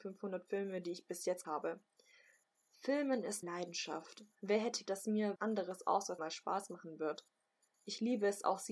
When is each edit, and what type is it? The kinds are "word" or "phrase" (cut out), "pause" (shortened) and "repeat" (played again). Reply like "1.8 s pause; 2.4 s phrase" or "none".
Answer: 1.4 s word; 3.4 s word; 4.9 s word; 5.4 s word; 6.2 s word